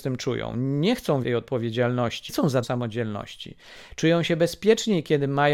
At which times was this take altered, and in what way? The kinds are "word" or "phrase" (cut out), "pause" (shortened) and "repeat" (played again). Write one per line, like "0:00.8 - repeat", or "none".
0:01.2 - word
0:02.3 - word
0:02.6 - word